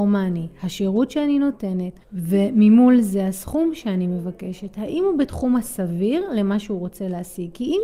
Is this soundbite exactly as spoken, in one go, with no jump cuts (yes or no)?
no